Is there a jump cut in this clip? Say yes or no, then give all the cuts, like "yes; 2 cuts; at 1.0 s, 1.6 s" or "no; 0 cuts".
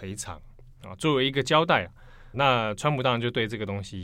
yes; 1 cut; at 2.3 s